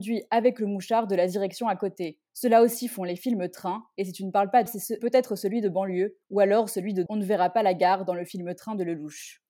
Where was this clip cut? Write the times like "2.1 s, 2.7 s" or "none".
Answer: 2.3 s, 4.7 s, 5.0 s, 6.2 s, 7.1 s